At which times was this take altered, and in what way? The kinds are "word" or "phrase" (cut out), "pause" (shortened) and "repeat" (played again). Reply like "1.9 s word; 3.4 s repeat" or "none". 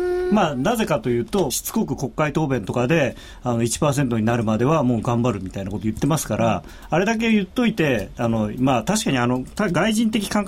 1.5 s phrase

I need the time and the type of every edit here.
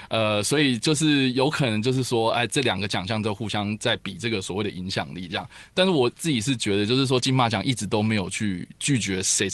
none

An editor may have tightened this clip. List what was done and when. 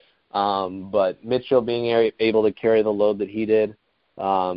none

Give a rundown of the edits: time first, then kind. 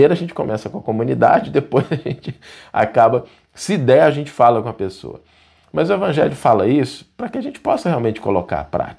none

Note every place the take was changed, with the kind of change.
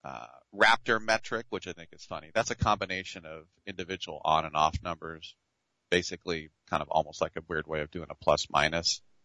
none

